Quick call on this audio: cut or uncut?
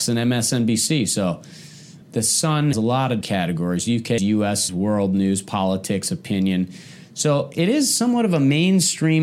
cut